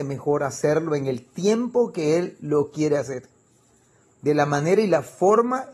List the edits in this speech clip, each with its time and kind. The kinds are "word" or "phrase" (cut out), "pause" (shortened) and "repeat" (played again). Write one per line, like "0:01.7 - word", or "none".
none